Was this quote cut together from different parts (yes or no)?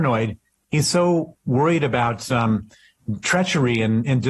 no